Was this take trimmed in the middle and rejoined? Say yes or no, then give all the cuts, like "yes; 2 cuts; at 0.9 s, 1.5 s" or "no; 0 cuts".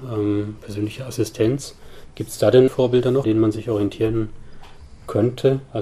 yes; 2 cuts; at 2.7 s, 3.2 s